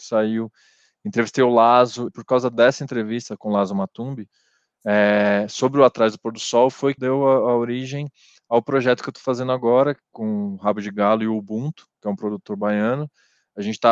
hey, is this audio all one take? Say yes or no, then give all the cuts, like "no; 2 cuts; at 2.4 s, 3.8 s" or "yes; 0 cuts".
no; 2 cuts; at 2.1 s, 7.0 s